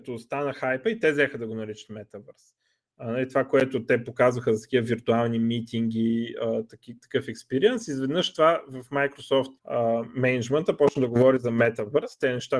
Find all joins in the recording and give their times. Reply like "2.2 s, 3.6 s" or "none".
9.6 s